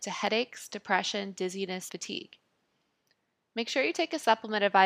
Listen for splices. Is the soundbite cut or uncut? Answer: cut